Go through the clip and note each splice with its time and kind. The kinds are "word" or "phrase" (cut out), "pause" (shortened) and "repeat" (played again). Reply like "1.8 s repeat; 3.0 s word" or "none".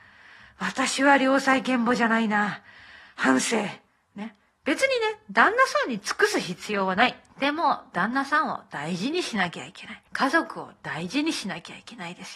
3.9 s pause; 7.3 s pause; 10.1 s pause